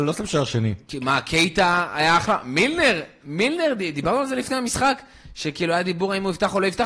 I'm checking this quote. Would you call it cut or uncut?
uncut